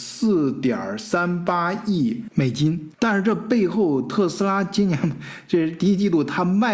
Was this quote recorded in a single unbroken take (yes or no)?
no